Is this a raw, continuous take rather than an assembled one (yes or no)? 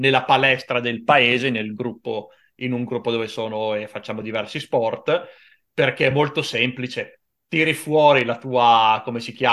yes